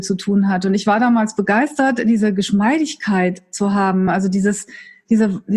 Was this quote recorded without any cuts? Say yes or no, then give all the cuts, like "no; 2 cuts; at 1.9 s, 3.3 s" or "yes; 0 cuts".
yes; 0 cuts